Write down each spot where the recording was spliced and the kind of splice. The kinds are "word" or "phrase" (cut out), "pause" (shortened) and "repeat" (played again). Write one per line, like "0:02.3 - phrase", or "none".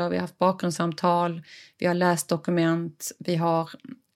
none